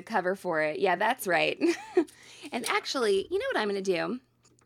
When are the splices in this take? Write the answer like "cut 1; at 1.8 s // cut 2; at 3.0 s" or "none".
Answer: none